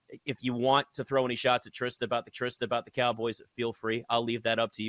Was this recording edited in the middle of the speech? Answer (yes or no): yes